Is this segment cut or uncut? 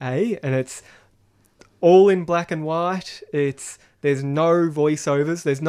uncut